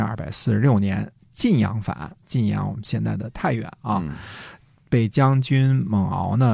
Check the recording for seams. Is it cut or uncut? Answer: cut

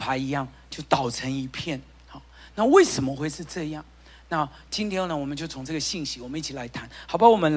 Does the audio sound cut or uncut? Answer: uncut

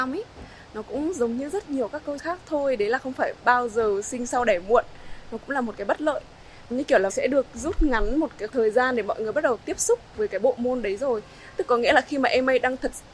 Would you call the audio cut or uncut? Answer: cut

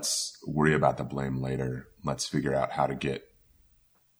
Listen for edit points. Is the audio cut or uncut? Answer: uncut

